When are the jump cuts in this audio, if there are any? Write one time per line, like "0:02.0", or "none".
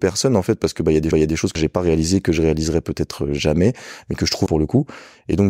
0:01.1
0:01.6
0:04.5